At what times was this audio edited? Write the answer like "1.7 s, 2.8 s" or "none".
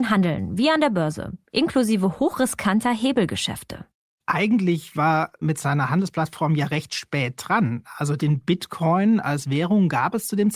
5.4 s